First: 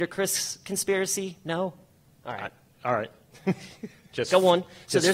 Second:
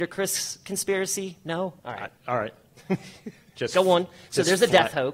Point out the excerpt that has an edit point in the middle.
second; 2 cuts; at 1.8 s, 2.2 s

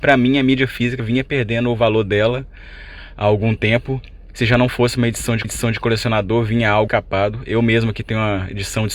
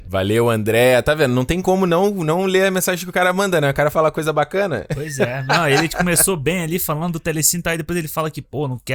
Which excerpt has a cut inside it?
first; 3 cuts; at 1.0 s, 5.4 s, 6.9 s

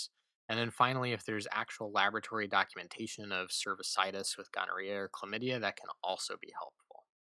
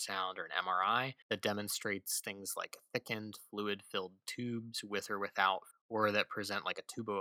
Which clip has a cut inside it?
second; 2 cuts; at 1.2 s, 5.7 s

